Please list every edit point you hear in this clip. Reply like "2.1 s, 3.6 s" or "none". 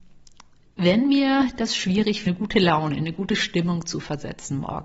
2.3 s